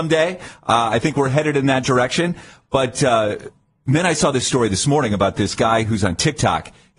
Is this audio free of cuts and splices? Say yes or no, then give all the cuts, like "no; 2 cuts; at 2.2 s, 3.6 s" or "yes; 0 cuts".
yes; 0 cuts